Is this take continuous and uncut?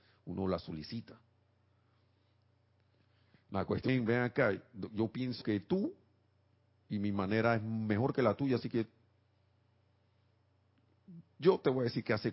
no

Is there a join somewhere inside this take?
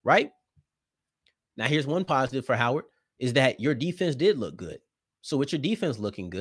no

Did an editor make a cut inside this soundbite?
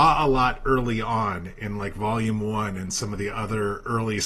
no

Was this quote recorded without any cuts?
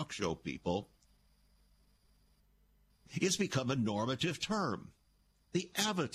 yes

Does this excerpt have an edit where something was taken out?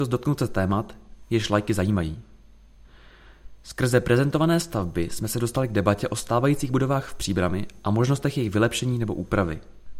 no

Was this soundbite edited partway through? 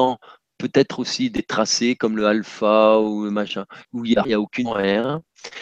yes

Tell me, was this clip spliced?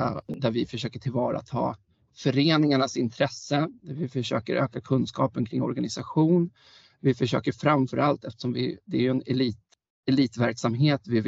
no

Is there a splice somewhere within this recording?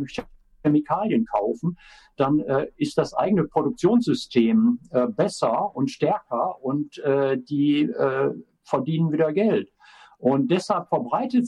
no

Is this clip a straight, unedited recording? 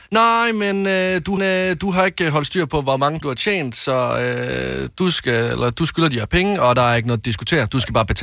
no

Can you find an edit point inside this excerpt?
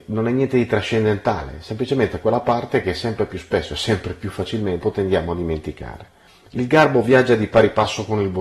yes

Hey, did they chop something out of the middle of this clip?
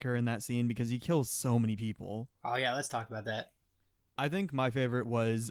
no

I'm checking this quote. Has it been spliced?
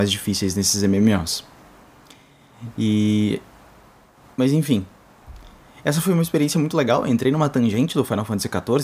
no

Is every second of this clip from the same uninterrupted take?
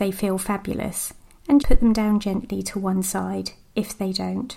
no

